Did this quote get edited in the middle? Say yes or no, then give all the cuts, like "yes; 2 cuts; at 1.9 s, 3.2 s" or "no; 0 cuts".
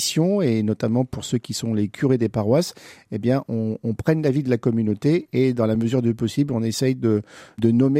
no; 0 cuts